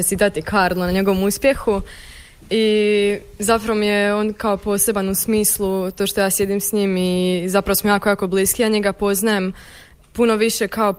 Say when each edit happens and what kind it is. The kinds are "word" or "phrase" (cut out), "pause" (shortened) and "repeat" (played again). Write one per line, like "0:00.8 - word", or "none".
none